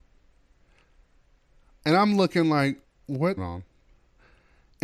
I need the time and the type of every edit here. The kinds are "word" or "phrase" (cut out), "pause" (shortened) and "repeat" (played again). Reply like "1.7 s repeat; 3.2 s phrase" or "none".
2.8 s pause; 3.4 s phrase